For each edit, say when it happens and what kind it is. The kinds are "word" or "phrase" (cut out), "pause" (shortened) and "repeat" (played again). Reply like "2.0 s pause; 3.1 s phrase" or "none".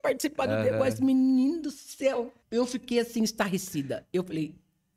2.4 s pause